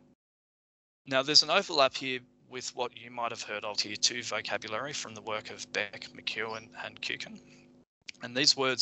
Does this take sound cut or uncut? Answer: cut